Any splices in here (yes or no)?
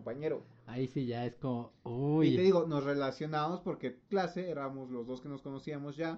yes